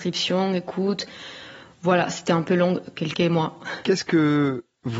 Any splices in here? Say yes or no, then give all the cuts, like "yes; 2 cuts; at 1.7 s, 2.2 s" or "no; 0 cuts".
no; 0 cuts